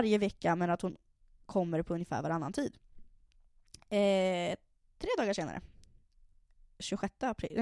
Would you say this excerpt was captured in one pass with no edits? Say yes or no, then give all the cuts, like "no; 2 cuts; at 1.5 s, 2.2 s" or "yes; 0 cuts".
yes; 0 cuts